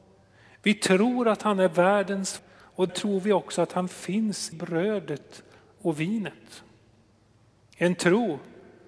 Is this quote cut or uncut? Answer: cut